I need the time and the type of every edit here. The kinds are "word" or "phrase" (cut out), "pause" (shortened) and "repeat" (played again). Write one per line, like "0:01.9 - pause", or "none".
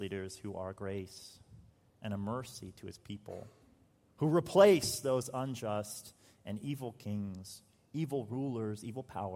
none